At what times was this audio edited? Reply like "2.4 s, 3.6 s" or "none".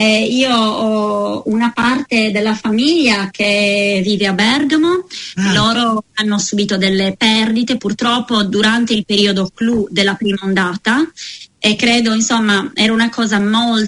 none